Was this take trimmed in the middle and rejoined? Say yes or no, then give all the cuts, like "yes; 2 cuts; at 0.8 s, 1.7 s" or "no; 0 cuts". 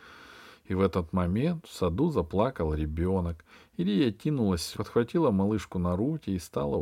yes; 1 cut; at 4.7 s